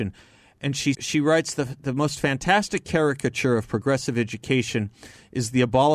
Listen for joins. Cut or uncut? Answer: cut